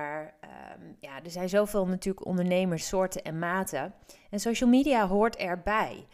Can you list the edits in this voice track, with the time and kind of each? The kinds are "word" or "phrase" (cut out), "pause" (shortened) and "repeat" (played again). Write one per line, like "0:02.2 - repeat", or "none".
0:02.8 - phrase